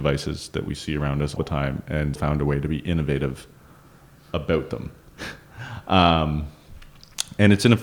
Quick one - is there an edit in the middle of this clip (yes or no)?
yes